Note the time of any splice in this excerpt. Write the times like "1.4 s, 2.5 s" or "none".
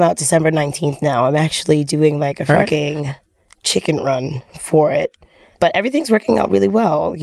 none